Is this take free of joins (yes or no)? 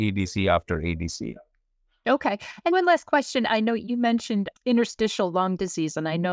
no